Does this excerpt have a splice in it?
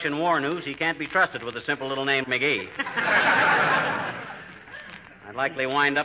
yes; 1 cut; at 2.2 s

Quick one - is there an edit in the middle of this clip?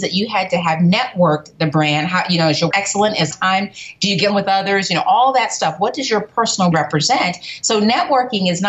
yes; 4 cuts; at 2.7 s, 3.3 s, 4.3 s, 6.7 s

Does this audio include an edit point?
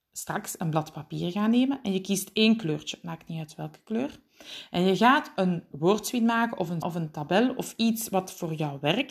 yes; 2 cuts; at 5.7 s, 6.8 s

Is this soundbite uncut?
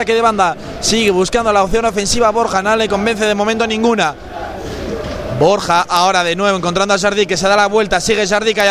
yes; 0 cuts

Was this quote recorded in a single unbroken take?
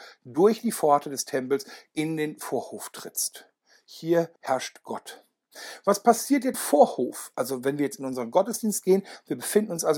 no; 2 cuts; at 4.4 s, 6.5 s

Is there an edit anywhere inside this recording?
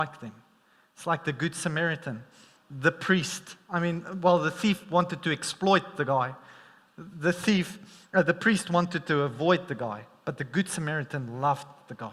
no; 0 cuts

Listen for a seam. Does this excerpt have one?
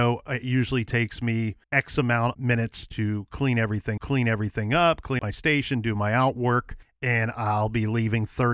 yes; 5 cuts; at 1.6 s, 2.3 s, 4.0 s, 5.2 s, 6.8 s

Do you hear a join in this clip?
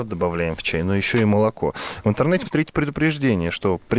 yes; 1 cut; at 2.4 s

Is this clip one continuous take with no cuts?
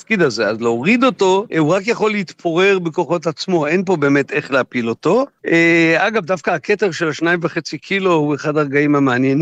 no; 1 cut; at 1.5 s

